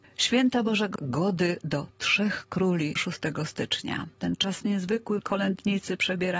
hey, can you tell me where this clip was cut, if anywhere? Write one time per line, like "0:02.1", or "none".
0:01.0
0:01.6
0:03.0
0:04.1
0:05.2